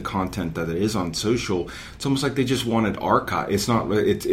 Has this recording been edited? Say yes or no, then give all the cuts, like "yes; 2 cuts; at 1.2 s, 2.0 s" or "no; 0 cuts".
no; 0 cuts